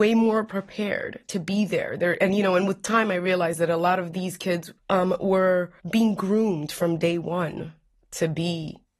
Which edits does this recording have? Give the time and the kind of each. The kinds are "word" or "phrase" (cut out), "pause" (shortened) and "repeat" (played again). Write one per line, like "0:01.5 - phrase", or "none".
0:04.8 - pause
0:05.8 - pause